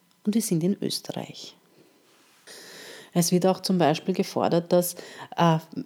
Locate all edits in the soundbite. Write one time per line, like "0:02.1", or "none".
none